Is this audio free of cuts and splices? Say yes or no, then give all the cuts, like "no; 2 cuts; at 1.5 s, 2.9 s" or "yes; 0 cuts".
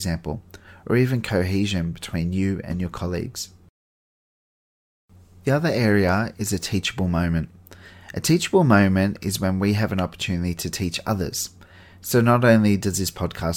yes; 0 cuts